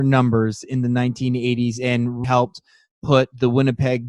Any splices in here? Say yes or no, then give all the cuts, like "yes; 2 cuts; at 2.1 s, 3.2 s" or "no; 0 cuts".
yes; 1 cut; at 2.2 s